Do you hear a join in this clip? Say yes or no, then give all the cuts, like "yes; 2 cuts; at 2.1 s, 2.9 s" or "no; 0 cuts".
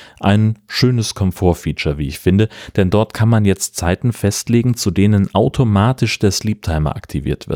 no; 0 cuts